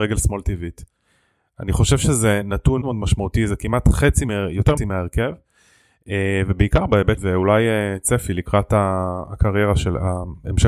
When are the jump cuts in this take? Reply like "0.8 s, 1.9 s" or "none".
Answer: 2.8 s, 4.8 s, 7.2 s